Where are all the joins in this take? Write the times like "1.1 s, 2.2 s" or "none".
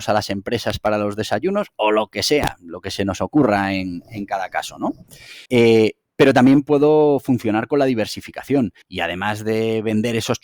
5.4 s, 8.8 s